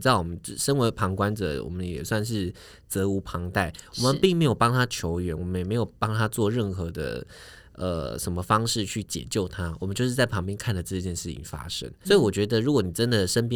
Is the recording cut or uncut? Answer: cut